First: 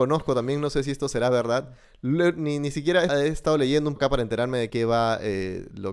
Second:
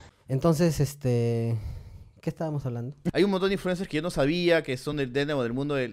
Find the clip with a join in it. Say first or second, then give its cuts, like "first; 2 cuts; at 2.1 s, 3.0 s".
first; 3 cuts; at 3.1 s, 4.0 s, 4.7 s